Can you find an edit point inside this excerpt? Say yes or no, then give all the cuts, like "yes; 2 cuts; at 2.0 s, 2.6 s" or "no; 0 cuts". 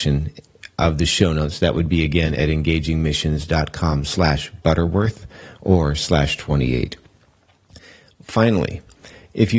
no; 0 cuts